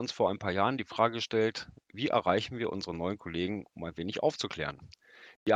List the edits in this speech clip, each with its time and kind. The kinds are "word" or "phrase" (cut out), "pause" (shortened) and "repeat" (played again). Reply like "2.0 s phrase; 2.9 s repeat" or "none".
none